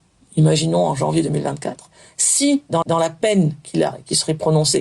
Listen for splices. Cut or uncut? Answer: cut